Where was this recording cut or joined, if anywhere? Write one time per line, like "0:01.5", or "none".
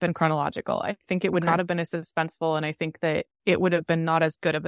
0:03.3